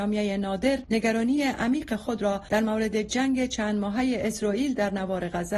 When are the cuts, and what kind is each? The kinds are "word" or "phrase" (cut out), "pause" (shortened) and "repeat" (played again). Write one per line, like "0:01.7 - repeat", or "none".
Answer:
none